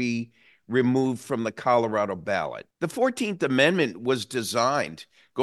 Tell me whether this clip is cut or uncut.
cut